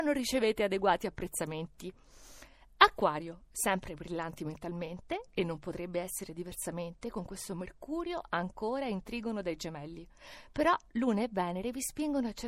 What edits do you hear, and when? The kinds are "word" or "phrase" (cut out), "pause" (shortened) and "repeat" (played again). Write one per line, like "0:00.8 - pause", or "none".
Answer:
none

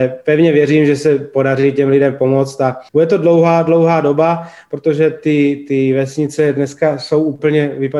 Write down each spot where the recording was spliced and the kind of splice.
0:02.9 - pause

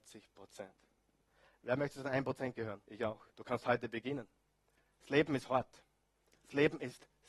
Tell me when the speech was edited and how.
0:02.8 - pause
0:03.3 - pause

